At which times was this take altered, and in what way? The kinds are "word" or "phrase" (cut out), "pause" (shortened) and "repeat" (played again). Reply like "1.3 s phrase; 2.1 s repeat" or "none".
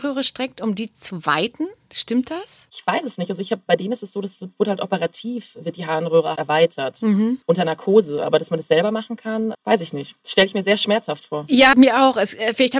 6.4 s word; 9.5 s word; 11.7 s word